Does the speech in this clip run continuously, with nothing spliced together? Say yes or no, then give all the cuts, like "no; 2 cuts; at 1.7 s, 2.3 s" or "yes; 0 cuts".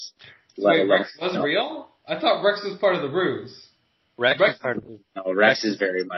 yes; 0 cuts